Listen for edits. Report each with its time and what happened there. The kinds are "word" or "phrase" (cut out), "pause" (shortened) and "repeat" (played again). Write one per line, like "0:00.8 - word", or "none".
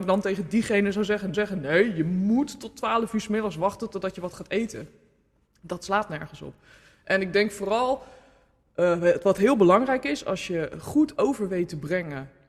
0:01.3 - repeat